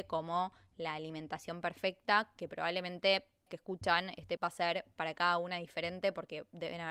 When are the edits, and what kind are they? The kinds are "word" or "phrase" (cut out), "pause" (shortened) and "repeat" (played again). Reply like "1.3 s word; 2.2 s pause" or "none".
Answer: 3.5 s phrase; 4.4 s word

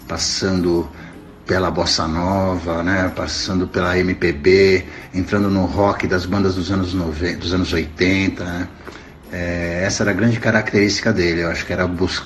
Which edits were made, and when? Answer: none

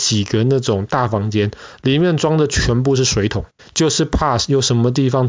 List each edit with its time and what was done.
3.6 s phrase

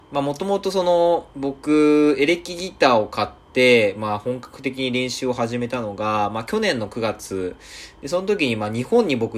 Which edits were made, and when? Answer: 1.3 s pause

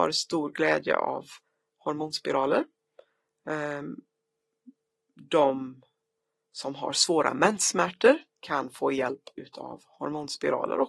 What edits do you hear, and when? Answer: 8.3 s pause

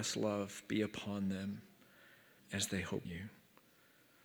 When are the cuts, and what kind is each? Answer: 2.4 s word; 3.0 s word

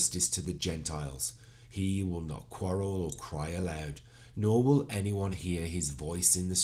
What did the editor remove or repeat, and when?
none

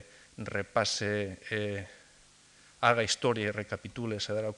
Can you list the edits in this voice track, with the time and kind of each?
none

